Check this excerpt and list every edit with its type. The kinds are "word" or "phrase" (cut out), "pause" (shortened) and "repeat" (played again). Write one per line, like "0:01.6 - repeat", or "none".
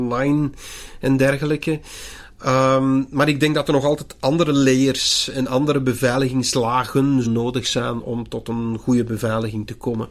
0:07.3 - word
0:08.0 - word